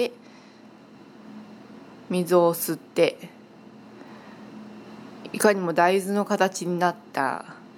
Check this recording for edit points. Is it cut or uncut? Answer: uncut